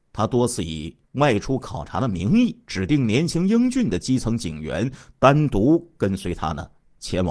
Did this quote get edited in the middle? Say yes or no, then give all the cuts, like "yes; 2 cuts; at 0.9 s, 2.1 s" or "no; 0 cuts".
yes; 1 cut; at 2.6 s